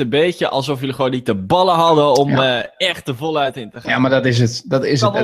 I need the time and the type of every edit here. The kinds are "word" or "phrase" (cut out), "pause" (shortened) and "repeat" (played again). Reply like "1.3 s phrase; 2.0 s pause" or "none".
none